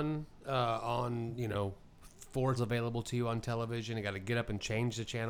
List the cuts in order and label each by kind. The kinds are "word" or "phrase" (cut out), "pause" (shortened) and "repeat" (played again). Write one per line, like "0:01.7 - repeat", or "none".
0:02.6 - word